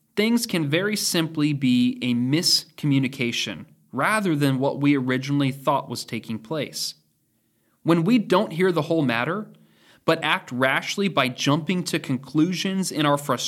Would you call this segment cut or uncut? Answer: uncut